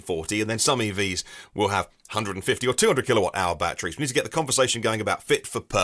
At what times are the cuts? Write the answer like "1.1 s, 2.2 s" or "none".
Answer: none